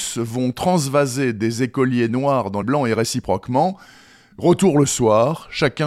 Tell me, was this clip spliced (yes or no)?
yes